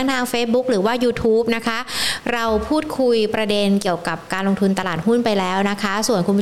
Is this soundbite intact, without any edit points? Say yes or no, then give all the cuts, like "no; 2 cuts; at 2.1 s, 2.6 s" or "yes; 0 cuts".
yes; 0 cuts